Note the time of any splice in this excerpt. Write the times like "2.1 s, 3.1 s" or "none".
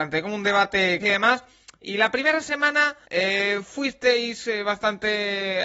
1.0 s, 3.0 s